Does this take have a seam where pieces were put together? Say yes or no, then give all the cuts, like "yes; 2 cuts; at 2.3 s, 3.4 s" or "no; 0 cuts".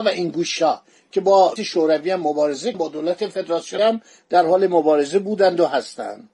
yes; 3 cuts; at 1.6 s, 2.7 s, 3.8 s